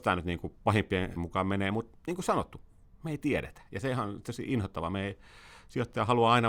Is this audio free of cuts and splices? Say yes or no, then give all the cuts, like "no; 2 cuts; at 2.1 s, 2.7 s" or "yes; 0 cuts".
no; 1 cut; at 1.2 s